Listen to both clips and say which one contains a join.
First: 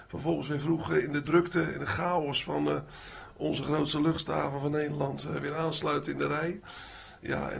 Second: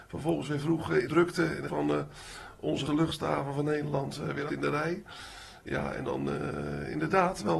second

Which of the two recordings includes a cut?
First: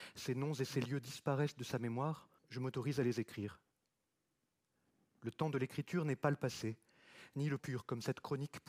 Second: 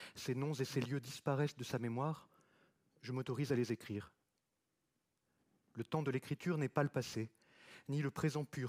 first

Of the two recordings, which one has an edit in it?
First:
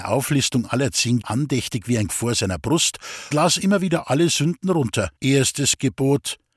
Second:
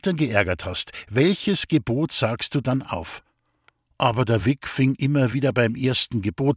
first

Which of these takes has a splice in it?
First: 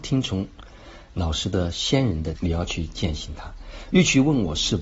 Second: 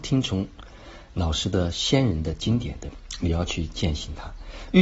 first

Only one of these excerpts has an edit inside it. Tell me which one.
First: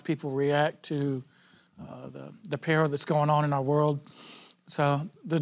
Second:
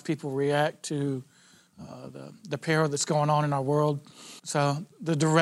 second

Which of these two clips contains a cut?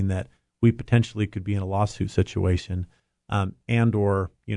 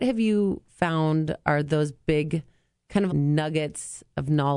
second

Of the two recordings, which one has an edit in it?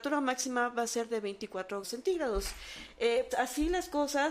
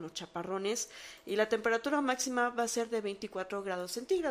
first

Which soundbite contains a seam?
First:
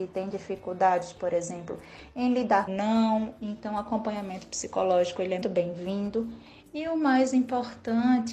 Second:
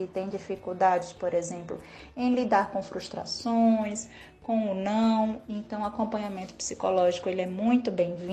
first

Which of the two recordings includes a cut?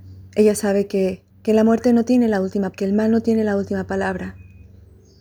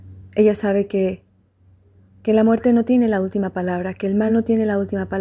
first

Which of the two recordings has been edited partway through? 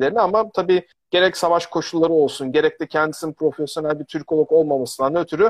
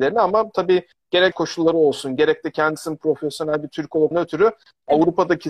second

